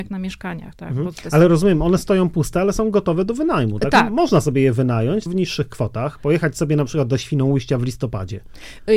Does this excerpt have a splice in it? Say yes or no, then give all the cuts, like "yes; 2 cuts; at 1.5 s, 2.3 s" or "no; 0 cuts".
yes; 1 cut; at 5.3 s